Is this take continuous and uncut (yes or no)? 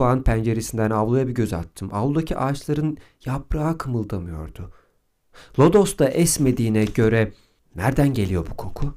yes